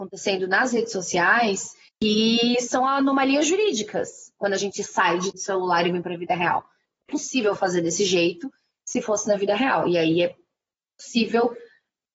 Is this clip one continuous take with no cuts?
no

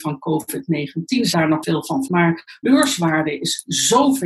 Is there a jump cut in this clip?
yes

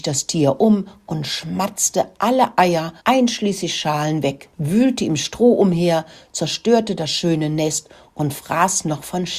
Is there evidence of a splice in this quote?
yes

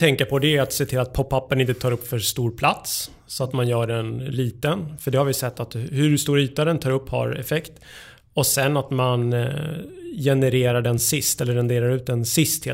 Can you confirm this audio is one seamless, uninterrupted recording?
yes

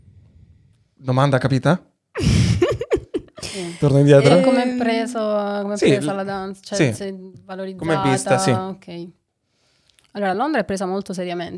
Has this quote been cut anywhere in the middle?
no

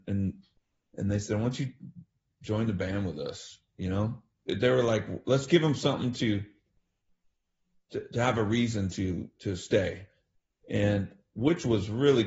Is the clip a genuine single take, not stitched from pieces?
yes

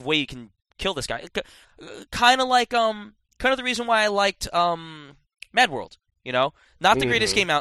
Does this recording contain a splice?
no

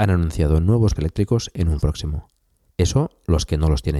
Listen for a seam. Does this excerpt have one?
yes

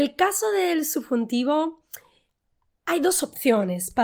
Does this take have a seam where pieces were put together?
no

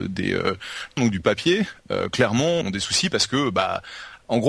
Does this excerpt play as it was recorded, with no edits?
no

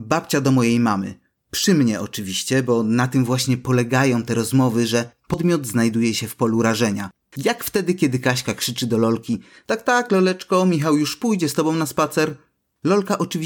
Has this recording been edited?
no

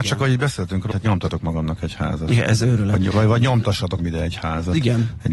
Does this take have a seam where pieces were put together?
yes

